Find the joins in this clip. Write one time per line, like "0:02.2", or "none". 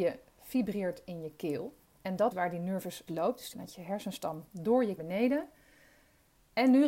0:01.8
0:02.3
0:03.1
0:03.5
0:05.0